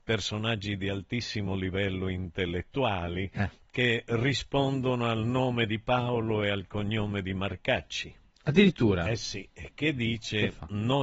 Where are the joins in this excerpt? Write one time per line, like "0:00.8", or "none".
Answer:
none